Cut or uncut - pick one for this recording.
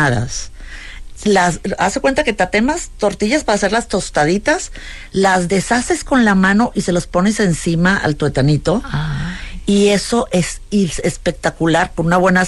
uncut